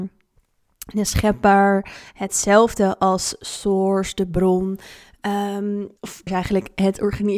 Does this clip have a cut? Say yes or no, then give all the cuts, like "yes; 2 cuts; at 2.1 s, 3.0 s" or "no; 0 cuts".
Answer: yes; 2 cuts; at 6.0 s, 6.3 s